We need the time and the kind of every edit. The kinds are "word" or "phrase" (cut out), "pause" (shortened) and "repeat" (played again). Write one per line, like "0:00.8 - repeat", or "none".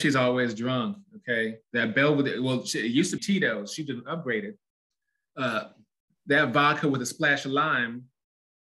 0:01.6 - pause
0:03.2 - word

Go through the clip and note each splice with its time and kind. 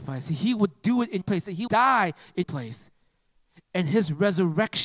0:01.2 - word
0:01.7 - word
0:02.4 - word

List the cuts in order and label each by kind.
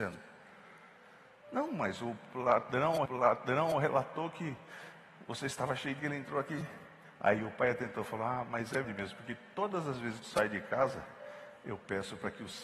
0:03.1 - repeat
0:06.0 - word
0:08.8 - word
0:10.2 - word

